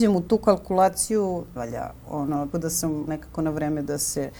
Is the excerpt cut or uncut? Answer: cut